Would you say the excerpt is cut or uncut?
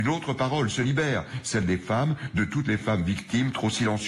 uncut